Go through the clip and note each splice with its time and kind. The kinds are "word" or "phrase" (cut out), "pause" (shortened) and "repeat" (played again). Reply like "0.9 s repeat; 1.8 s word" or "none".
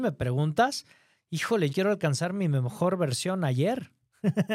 1.7 s word